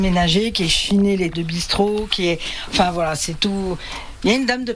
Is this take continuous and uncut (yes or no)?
no